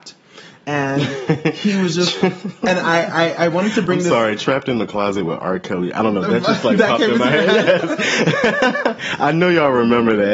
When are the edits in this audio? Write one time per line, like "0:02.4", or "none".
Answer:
none